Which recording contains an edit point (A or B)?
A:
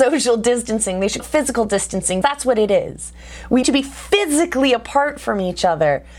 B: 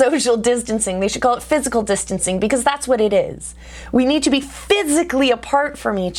A